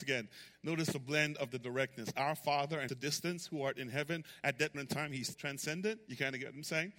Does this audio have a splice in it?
yes; 3 cuts; at 2.9 s, 4.7 s, 5.3 s

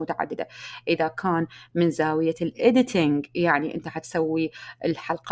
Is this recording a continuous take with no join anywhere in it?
yes; 0 cuts

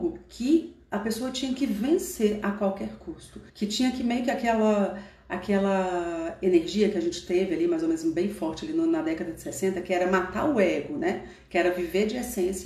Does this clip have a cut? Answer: yes; 1 cut; at 3.5 s

